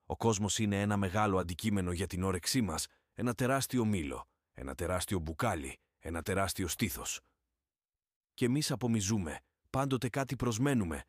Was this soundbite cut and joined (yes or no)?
no